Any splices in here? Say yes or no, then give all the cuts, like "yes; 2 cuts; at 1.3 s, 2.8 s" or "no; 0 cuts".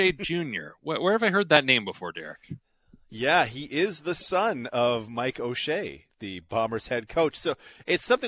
no; 0 cuts